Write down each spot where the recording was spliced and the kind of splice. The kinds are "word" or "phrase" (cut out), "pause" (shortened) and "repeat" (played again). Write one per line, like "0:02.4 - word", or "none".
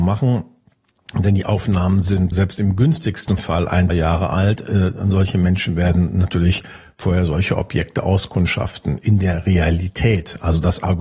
0:02.3 - word
0:03.9 - word